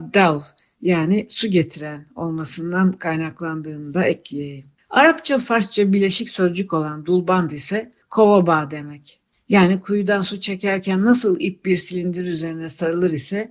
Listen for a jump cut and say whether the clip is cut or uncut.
cut